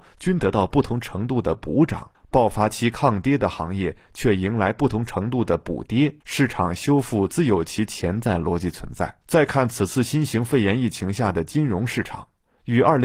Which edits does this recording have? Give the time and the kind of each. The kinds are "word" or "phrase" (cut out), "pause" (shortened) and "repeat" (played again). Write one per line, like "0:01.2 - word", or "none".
0:02.1 - pause
0:06.2 - pause
0:09.2 - pause